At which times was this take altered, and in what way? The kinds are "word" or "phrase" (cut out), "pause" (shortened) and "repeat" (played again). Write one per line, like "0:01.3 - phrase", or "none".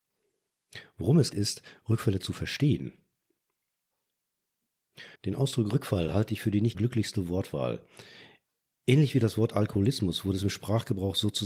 0:01.3 - word
0:05.2 - pause
0:06.7 - word